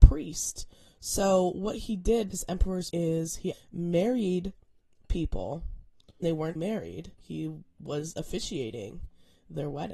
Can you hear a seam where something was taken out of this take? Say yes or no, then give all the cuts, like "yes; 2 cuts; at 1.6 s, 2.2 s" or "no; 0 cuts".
yes; 6 cuts; at 2.3 s, 2.9 s, 3.5 s, 6.2 s, 6.6 s, 7.1 s